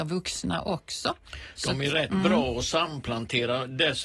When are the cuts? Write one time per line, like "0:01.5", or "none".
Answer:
none